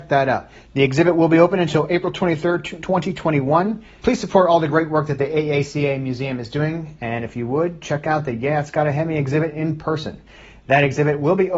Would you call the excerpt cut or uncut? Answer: uncut